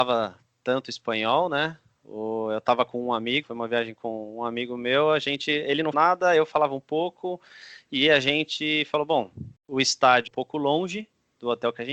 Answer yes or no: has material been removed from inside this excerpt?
yes